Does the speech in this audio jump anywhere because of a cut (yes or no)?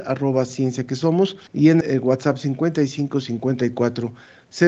yes